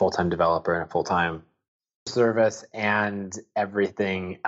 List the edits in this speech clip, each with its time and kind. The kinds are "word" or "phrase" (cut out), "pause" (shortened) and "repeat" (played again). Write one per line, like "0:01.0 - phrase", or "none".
0:02.1 - word